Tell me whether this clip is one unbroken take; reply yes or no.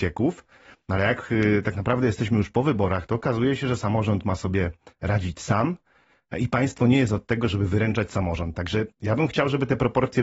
yes